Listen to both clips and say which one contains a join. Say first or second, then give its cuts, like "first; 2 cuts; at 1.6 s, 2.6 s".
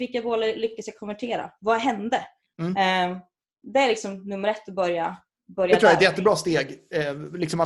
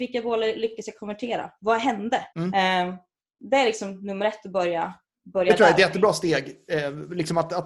second; 1 cut; at 2.3 s